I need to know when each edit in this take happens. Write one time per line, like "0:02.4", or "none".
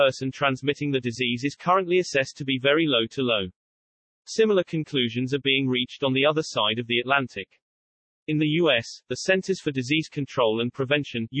none